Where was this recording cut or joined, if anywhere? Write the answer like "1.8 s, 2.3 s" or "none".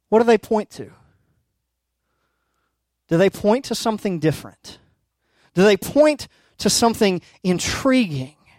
none